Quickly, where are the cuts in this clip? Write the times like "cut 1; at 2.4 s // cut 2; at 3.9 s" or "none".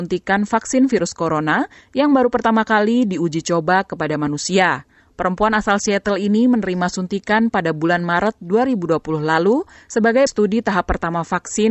cut 1; at 10.3 s